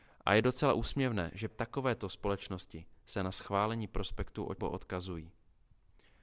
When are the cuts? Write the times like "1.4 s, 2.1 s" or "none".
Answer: 1.5 s, 4.6 s